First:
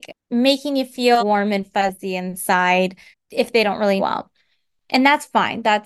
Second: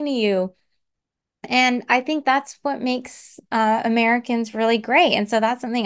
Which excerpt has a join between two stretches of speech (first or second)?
first